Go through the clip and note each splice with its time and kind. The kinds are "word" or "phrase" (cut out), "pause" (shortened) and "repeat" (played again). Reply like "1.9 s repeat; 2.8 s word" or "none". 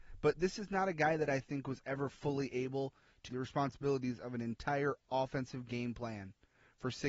3.3 s word